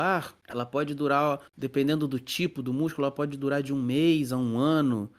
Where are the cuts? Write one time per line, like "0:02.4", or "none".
0:01.5